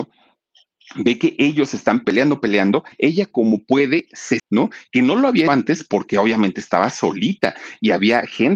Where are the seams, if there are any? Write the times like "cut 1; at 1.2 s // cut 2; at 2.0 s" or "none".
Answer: cut 1; at 2.0 s // cut 2; at 2.9 s // cut 3; at 4.4 s // cut 4; at 5.5 s